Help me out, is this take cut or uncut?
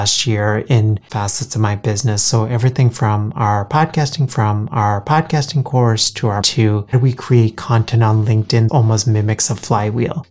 cut